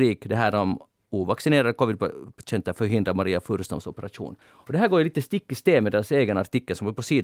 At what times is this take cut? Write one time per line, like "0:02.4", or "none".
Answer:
0:04.4